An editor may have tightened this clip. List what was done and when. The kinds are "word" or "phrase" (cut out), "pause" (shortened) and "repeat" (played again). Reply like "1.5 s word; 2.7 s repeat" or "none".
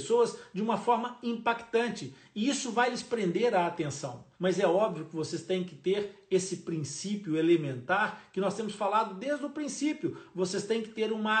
4.3 s pause